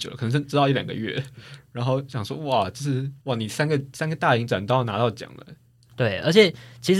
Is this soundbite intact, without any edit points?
no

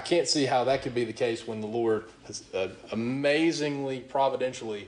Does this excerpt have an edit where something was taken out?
no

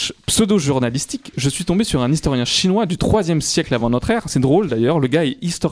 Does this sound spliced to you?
no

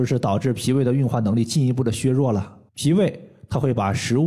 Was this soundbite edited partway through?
yes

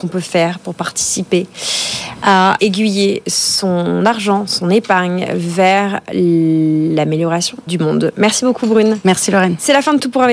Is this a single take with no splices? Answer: no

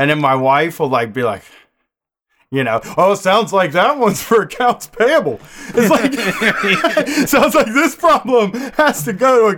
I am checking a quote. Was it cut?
no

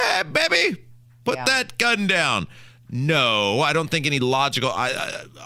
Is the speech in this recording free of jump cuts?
yes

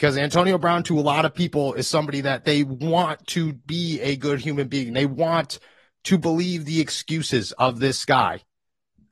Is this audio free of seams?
yes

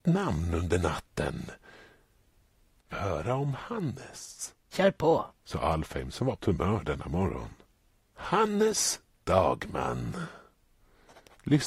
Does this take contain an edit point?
yes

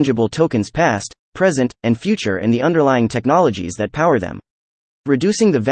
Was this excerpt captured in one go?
yes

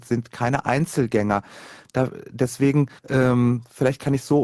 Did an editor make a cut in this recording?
yes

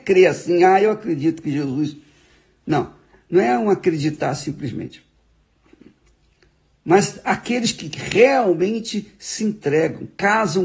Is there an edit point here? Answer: no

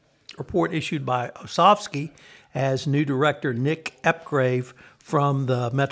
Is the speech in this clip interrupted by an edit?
no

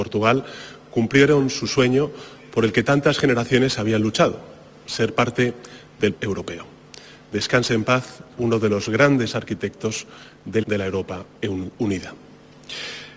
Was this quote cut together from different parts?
yes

